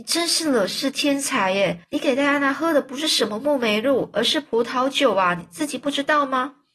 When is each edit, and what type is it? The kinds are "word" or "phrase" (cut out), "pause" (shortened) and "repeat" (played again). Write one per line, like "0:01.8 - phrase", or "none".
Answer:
0:01.8 - pause

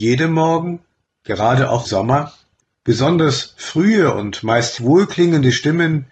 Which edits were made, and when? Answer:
0:01.8 - word
0:02.6 - pause
0:04.8 - word

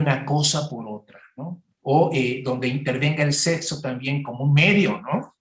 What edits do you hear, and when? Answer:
0:01.7 - pause

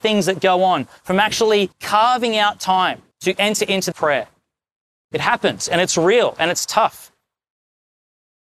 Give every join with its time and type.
0:01.7 - pause
0:03.1 - pause
0:03.9 - phrase

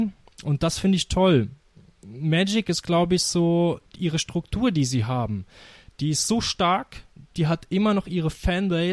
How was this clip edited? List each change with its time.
none

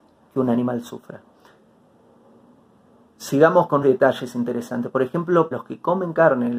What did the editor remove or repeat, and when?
0:03.8 - word
0:05.5 - word

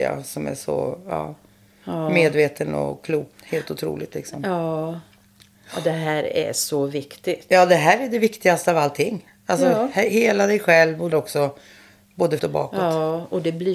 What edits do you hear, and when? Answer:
0:03.3 - word
0:11.1 - word
0:12.4 - word

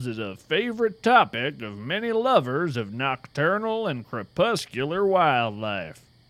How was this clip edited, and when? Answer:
none

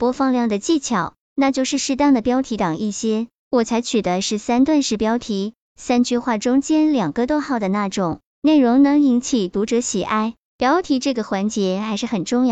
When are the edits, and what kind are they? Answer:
none

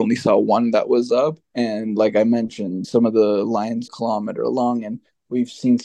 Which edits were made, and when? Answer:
0:01.4 - pause
0:02.8 - word
0:03.9 - phrase

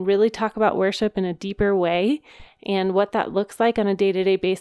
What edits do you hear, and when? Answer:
none

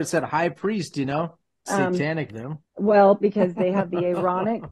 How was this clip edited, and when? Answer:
0:01.7 - phrase
0:02.3 - word
0:02.7 - pause

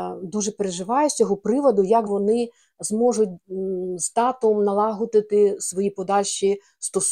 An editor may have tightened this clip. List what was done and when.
0:02.1 - word

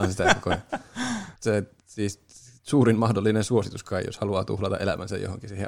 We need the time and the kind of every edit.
0:01.4 - pause

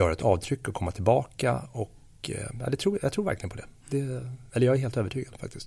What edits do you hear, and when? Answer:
0:04.5 - pause

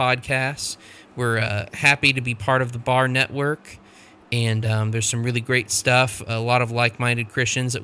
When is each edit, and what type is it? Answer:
none

